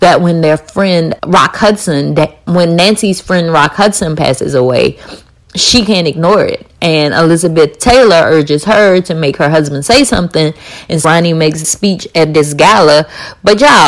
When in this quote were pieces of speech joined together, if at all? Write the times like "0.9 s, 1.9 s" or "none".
1.2 s, 2.5 s, 11.0 s, 11.6 s